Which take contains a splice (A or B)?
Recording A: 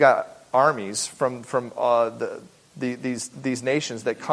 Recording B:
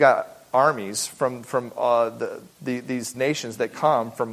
B